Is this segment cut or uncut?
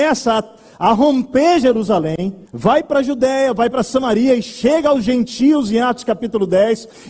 cut